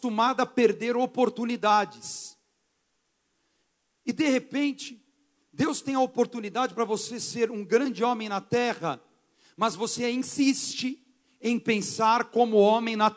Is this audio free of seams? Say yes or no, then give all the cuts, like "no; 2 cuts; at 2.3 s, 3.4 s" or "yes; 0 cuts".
yes; 0 cuts